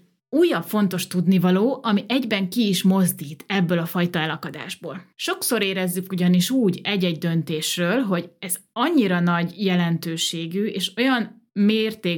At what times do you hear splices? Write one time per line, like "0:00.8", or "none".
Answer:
0:05.1